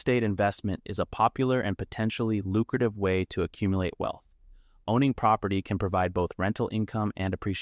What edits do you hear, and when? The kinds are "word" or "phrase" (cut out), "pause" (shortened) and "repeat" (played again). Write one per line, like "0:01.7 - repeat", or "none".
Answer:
none